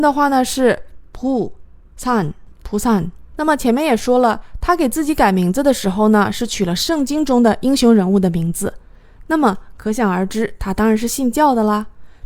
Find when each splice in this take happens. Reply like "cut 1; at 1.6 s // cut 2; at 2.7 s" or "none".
cut 1; at 2.5 s // cut 2; at 3.3 s